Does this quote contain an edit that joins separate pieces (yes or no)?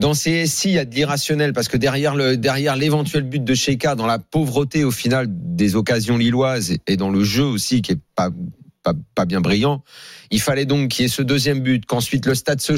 no